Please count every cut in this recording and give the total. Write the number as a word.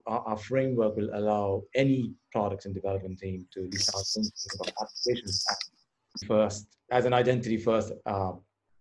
three